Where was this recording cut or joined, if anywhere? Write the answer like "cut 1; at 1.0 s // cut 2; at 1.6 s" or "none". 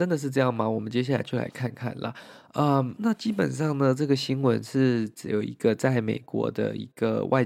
cut 1; at 3.0 s

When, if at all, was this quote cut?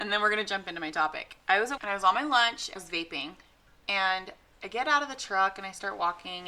cut 1; at 1.8 s // cut 2; at 2.8 s

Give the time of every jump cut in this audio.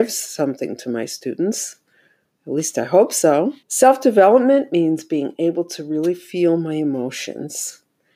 cut 1; at 3.6 s

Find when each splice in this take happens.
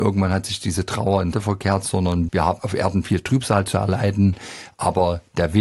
cut 1; at 1.3 s // cut 2; at 2.3 s // cut 3; at 2.6 s

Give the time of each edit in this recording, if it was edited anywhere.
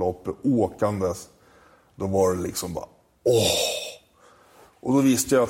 none

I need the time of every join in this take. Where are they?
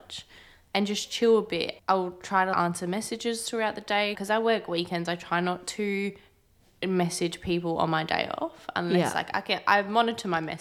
none

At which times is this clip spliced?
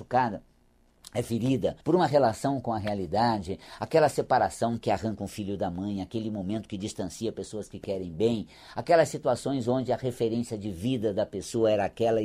cut 1; at 1.8 s

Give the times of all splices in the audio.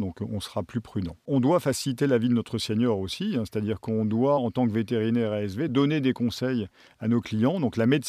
none

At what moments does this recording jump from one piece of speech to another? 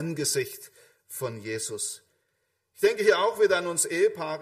none

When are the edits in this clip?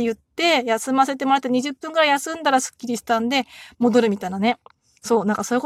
none

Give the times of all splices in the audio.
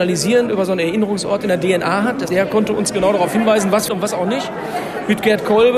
cut 1; at 2.3 s // cut 2; at 3.9 s

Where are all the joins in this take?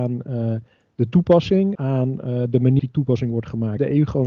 cut 1; at 1.7 s // cut 2; at 2.8 s

